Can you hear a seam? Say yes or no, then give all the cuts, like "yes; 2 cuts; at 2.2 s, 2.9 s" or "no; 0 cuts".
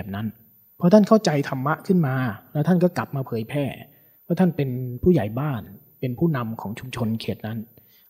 no; 0 cuts